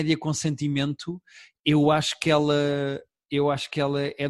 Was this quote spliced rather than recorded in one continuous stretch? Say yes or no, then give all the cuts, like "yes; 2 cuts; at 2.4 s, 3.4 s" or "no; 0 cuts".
no; 0 cuts